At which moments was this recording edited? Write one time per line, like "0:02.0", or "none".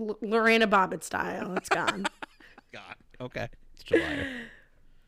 0:02.7
0:03.5